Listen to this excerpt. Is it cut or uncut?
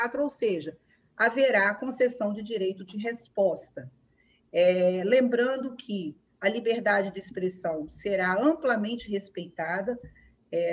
uncut